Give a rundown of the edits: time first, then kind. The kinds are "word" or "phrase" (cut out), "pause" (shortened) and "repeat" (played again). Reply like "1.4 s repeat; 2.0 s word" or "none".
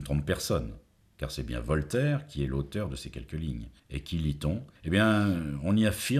3.8 s pause; 4.8 s pause